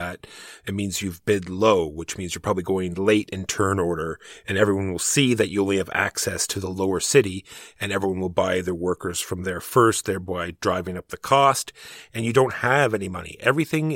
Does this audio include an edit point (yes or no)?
no